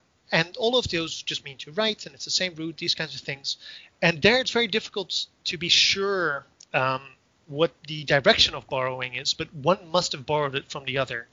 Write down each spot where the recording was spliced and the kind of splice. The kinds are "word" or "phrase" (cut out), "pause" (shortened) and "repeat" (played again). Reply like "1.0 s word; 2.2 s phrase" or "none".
none